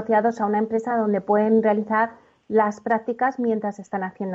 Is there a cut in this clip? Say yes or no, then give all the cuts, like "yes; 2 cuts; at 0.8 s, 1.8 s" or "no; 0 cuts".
no; 0 cuts